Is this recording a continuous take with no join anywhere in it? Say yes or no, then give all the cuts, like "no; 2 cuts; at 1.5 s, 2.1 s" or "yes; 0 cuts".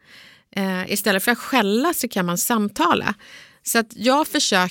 yes; 0 cuts